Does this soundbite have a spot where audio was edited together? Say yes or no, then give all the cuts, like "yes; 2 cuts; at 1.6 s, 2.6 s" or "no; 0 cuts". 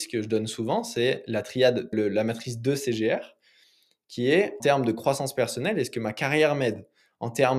yes; 2 cuts; at 1.9 s, 4.6 s